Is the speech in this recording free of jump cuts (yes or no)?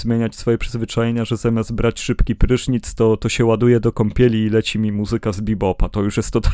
yes